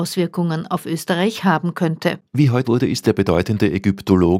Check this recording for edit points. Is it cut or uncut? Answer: cut